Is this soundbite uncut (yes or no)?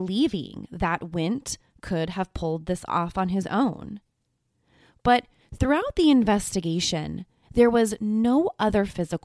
yes